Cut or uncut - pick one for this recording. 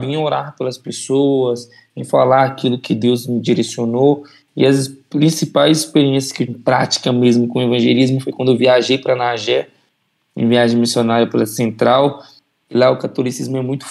cut